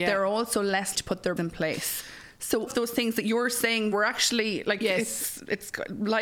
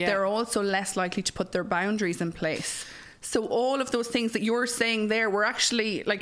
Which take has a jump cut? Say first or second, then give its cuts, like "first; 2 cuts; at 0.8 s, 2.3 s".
first; 4 cuts; at 0.9 s, 1.4 s, 2.7 s, 3.9 s